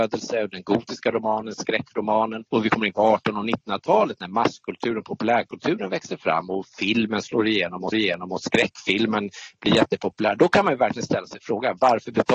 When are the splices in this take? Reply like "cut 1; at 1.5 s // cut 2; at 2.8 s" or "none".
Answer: cut 1; at 2.5 s // cut 2; at 7.9 s